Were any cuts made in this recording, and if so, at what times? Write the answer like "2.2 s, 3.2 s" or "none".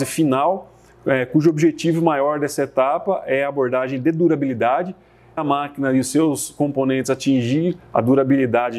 5.4 s